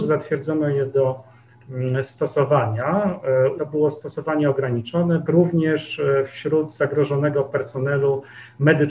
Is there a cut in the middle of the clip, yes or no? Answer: yes